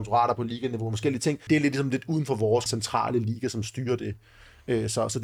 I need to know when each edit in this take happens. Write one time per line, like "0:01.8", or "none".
0:01.5
0:02.7